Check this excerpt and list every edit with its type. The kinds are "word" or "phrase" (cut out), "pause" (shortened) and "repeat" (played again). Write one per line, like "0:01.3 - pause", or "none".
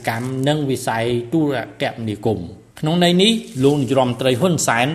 0:02.7 - pause